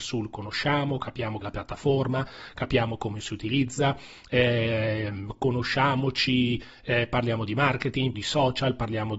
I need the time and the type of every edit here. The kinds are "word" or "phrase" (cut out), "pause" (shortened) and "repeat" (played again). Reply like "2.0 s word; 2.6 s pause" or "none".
1.4 s word; 8.1 s word